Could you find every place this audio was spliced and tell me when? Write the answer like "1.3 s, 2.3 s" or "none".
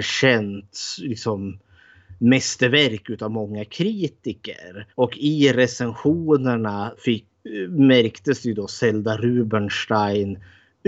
4.9 s, 7.0 s